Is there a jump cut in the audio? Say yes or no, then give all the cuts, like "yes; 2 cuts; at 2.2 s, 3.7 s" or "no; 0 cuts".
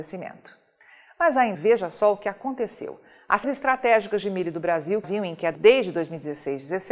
yes; 4 cuts; at 1.5 s, 3.4 s, 5.0 s, 5.5 s